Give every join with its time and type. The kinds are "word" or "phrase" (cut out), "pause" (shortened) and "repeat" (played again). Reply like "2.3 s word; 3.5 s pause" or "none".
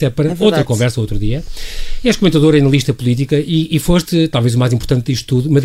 none